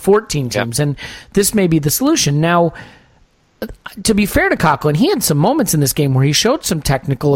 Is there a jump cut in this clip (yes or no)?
no